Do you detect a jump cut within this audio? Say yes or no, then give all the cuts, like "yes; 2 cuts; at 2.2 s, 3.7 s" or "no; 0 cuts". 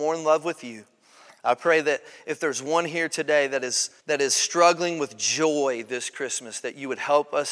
yes; 1 cut; at 4.0 s